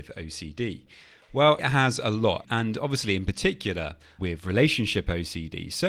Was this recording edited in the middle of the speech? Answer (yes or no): yes